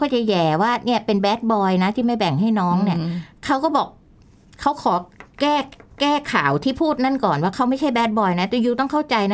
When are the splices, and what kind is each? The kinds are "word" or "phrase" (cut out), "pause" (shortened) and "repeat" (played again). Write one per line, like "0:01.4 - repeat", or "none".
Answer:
none